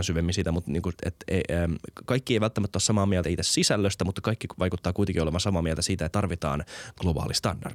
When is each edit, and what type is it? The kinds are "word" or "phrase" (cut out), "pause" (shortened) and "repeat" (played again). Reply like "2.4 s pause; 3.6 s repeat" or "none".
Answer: 1.0 s word; 2.0 s word; 3.2 s word; 6.1 s word